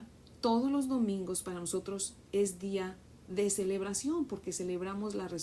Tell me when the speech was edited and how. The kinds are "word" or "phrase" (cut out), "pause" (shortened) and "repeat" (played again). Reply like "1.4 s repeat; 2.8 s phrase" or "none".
none